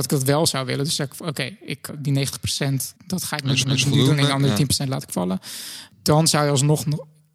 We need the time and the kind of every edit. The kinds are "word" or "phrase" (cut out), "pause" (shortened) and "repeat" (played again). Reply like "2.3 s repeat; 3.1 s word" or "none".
1.9 s word; 3.0 s pause; 3.6 s repeat; 5.9 s pause